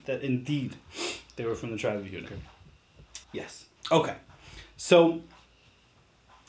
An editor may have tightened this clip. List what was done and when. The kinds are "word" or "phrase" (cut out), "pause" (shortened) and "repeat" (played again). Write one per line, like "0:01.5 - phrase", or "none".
0:03.2 - pause